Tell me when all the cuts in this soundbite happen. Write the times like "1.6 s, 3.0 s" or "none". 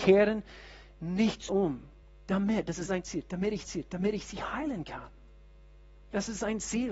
1.5 s, 2.0 s, 2.9 s, 3.6 s